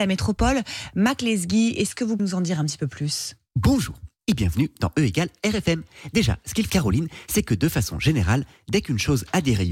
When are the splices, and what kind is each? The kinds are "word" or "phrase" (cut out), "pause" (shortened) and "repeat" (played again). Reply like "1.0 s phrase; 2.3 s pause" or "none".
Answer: 2.2 s word; 6.7 s word